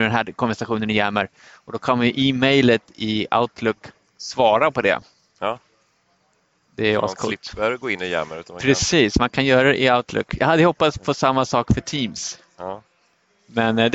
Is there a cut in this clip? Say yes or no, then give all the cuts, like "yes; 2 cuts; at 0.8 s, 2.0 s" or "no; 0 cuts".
no; 0 cuts